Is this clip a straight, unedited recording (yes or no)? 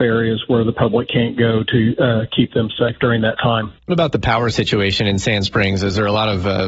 no